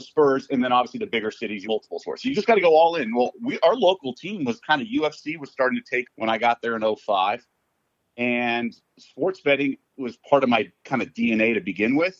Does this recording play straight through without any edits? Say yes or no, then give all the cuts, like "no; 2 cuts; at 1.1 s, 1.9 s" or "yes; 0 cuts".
no; 2 cuts; at 1.6 s, 6.0 s